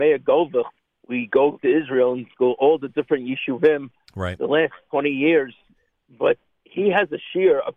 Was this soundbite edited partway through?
no; 0 cuts

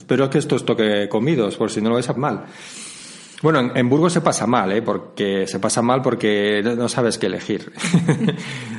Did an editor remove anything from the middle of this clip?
yes; 1 cut; at 2.1 s

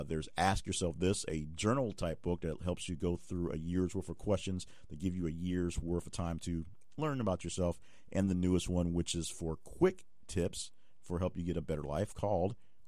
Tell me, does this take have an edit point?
no; 0 cuts

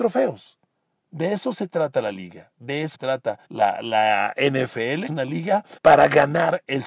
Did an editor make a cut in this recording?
yes; 4 cuts; at 2.9 s, 3.4 s, 5.1 s, 5.8 s

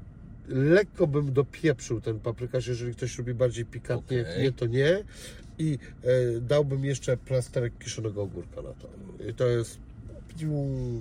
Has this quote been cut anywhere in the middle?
no; 0 cuts

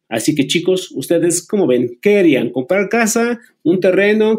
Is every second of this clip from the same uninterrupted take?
yes; 0 cuts

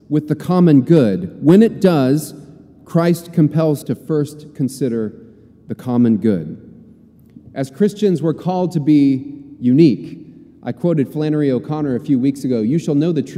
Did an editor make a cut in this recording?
yes; 1 cut; at 3.8 s

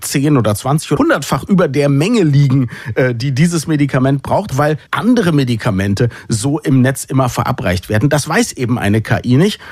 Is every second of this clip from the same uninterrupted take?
no; 3 cuts; at 1.0 s, 4.5 s, 4.9 s

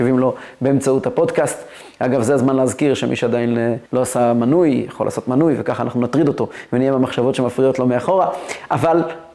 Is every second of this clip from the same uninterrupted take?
no; 1 cut; at 3.9 s

